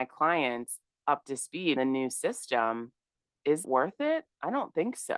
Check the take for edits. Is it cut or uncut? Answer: cut